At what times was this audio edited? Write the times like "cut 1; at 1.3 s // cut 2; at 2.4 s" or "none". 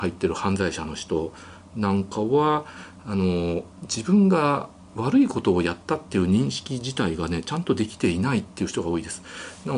cut 1; at 3.7 s